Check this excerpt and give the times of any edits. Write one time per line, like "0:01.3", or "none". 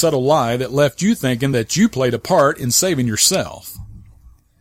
none